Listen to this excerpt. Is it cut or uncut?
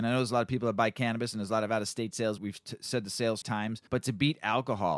cut